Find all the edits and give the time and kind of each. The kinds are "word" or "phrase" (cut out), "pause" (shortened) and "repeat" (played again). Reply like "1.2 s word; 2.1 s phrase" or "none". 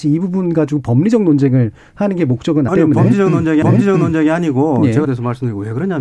2.7 s word; 3.6 s repeat; 5.0 s word